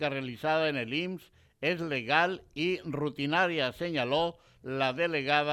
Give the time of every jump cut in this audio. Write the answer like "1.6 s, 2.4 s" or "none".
none